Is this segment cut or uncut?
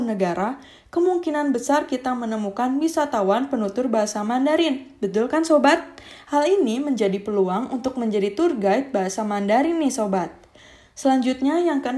uncut